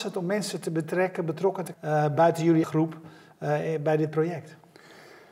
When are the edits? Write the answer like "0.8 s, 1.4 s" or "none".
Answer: 1.7 s, 2.6 s

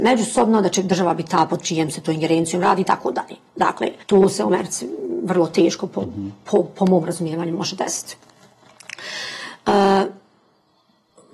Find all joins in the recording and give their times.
4.0 s

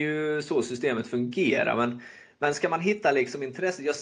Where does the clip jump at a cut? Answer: none

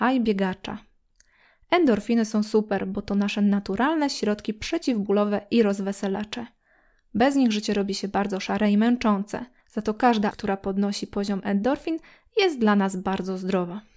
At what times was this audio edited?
10.3 s

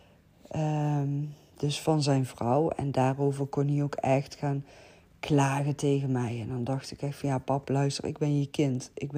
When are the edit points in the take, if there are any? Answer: none

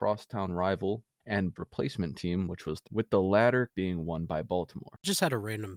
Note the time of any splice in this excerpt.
1.2 s, 1.6 s, 2.9 s, 3.7 s

